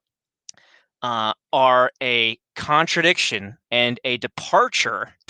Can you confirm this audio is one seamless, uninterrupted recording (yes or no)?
no